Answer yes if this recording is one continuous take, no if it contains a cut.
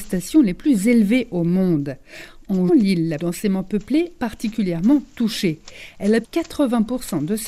no